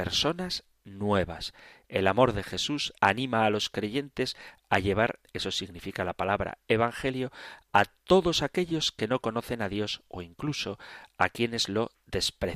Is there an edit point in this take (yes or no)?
yes